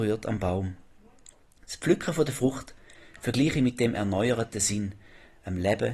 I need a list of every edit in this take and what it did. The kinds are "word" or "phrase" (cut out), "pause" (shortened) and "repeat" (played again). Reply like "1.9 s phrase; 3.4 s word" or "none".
none